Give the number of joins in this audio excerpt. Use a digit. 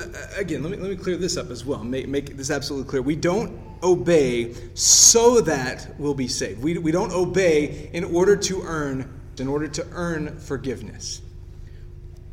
1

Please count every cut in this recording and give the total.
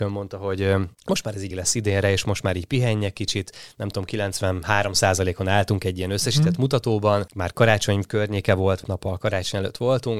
3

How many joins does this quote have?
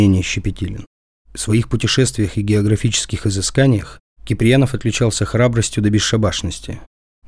1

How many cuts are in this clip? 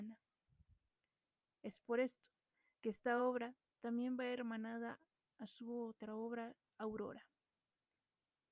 0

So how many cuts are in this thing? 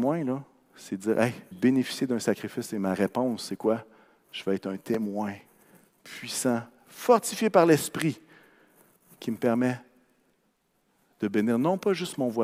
2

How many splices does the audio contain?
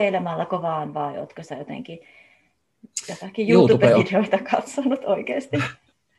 0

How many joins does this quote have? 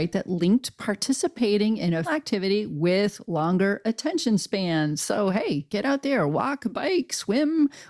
1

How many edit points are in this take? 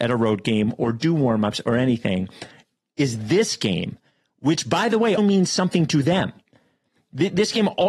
1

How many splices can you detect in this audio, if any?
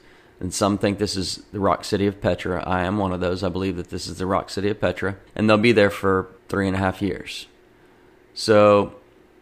2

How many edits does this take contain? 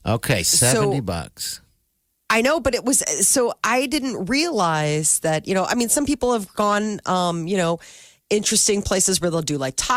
0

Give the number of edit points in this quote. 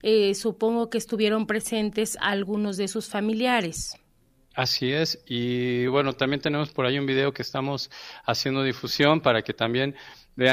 0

